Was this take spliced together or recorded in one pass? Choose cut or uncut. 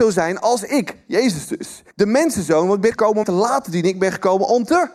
cut